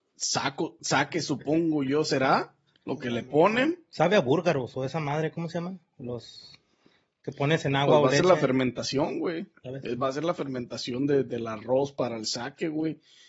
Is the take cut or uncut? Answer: uncut